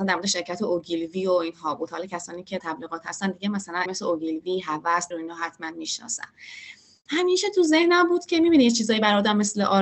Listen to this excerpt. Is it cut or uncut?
cut